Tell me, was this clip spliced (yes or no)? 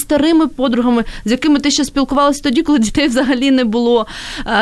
no